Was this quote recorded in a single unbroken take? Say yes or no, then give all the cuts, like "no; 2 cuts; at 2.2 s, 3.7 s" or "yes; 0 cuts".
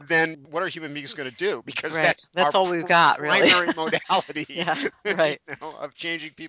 no; 1 cut; at 2.3 s